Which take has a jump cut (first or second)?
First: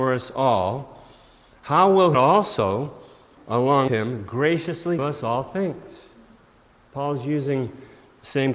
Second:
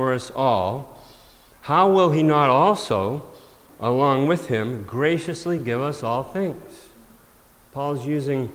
first